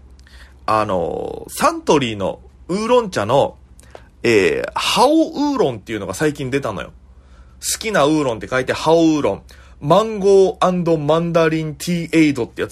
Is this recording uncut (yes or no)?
yes